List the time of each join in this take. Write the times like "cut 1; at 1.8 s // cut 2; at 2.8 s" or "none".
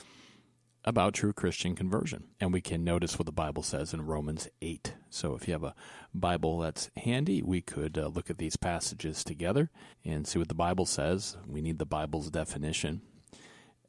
cut 1; at 2.3 s // cut 2; at 9.9 s